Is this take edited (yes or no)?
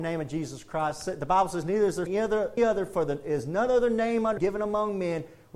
yes